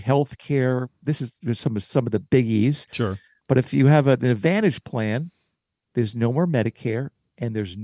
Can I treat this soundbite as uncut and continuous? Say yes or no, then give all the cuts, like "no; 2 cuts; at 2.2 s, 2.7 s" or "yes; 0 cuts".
yes; 0 cuts